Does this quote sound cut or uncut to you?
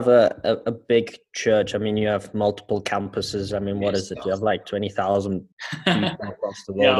cut